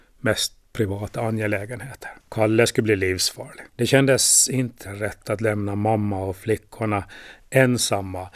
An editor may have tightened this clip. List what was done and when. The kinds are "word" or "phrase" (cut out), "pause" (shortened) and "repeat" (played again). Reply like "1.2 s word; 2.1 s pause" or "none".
2.2 s pause; 3.7 s pause; 4.9 s word